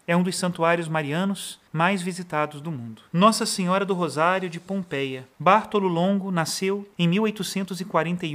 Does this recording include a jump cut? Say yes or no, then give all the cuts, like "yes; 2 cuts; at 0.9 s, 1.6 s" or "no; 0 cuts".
yes; 4 cuts; at 1.7 s, 3.1 s, 5.3 s, 6.9 s